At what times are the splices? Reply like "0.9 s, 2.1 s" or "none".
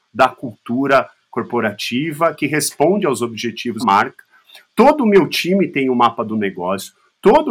3.8 s